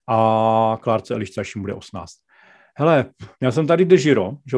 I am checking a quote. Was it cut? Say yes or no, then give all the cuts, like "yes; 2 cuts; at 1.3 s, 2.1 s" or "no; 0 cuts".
yes; 1 cut; at 3.3 s